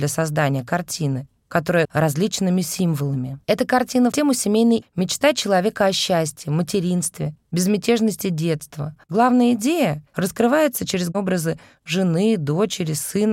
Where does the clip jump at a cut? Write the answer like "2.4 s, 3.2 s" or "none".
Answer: 1.8 s, 3.4 s, 4.1 s, 4.8 s, 9.0 s, 10.1 s

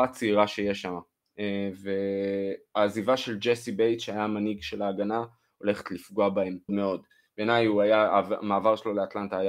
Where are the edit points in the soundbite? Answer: 6.7 s

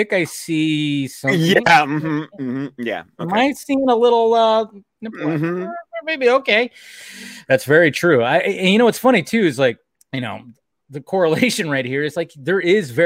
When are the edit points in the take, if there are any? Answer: 9.9 s

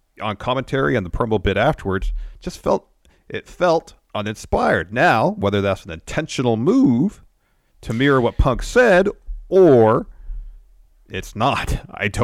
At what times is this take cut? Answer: none

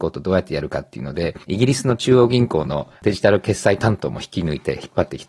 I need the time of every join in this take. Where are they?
1.4 s, 3.0 s

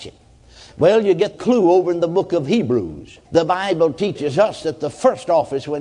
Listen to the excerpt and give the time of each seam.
1.3 s, 3.2 s

